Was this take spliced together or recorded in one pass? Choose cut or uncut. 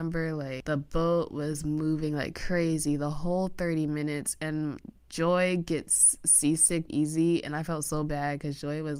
cut